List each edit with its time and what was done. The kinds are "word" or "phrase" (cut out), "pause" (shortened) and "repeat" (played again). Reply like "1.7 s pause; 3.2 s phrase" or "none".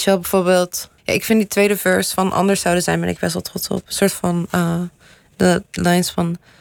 1.0 s pause